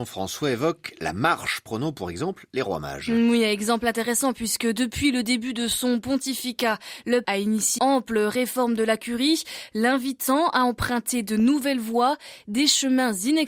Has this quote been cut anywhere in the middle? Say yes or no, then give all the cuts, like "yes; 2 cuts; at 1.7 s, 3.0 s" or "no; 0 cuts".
yes; 2 cuts; at 7.2 s, 7.8 s